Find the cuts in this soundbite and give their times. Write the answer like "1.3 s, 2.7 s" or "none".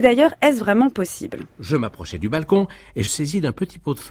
1.5 s, 3.1 s